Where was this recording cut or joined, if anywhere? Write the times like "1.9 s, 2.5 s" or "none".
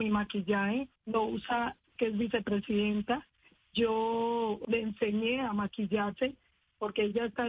1.0 s, 2.0 s, 4.6 s